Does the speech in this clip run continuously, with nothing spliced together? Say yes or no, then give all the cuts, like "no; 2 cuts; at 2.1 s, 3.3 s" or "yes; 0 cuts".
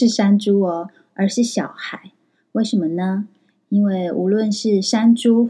yes; 0 cuts